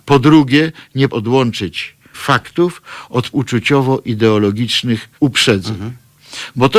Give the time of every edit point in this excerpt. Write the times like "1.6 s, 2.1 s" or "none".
1.1 s, 2.1 s, 3.3 s, 5.1 s

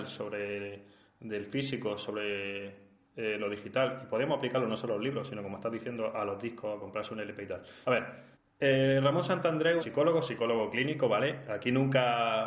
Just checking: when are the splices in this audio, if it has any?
7.8 s, 8.3 s, 9.8 s

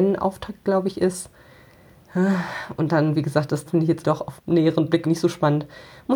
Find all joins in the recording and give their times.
3.7 s, 4.0 s, 4.4 s, 5.0 s

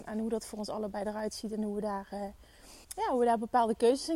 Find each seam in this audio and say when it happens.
2.8 s

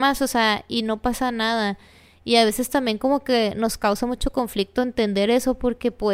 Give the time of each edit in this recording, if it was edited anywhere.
none

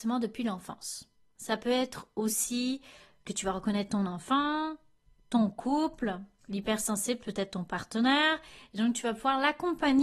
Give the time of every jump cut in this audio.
none

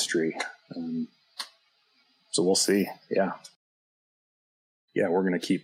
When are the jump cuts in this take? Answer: none

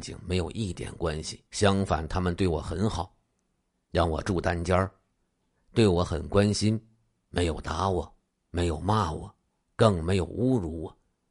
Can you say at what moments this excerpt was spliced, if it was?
1.5 s

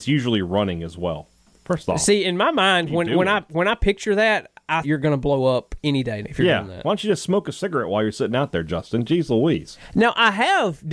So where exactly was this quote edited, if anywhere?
4.8 s, 6.2 s

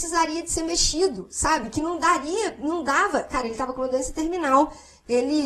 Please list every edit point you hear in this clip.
none

